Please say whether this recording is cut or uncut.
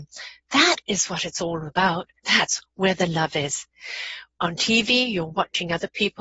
cut